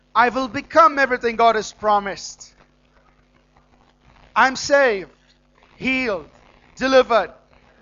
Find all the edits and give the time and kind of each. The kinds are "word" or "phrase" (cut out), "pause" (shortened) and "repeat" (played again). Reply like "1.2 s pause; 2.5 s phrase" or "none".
none